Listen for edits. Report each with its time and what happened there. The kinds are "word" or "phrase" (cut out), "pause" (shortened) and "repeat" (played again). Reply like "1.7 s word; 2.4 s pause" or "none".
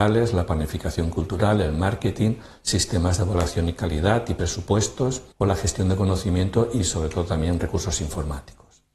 5.3 s pause